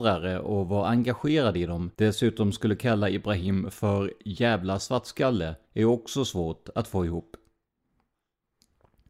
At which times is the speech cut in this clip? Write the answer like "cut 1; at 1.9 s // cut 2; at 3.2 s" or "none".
cut 1; at 1.9 s // cut 2; at 5.6 s